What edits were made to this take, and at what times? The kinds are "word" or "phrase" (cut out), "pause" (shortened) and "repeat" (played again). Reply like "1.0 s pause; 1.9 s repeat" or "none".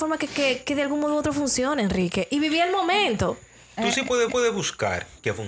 4.3 s repeat